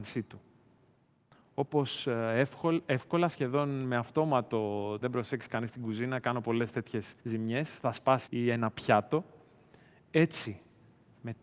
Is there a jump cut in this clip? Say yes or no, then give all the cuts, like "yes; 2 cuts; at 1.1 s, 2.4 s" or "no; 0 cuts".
yes; 3 cuts; at 5.0 s, 7.2 s, 8.3 s